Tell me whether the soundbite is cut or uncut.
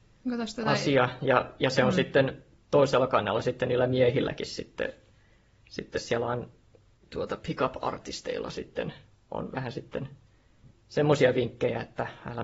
cut